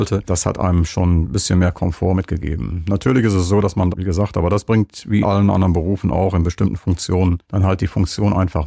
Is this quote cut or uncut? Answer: cut